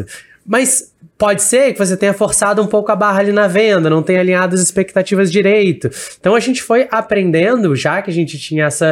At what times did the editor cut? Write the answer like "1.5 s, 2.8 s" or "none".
none